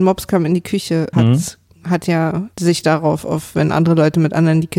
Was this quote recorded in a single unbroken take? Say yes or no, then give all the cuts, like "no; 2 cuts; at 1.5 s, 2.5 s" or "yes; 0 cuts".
no; 2 cuts; at 1.1 s, 2.5 s